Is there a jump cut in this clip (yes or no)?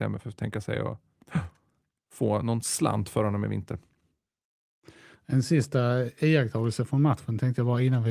no